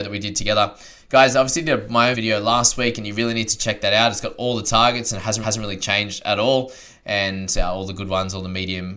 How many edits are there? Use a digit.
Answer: 2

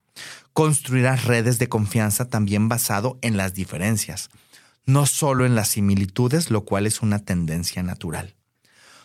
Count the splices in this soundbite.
0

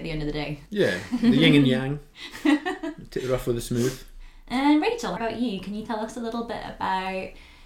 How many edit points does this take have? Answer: 1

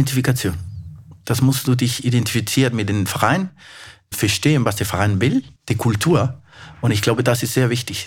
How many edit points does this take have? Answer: 1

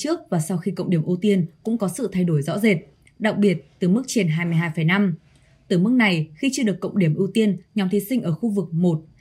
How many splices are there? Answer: 0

